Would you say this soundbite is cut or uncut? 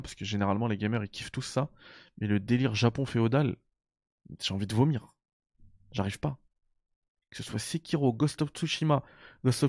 uncut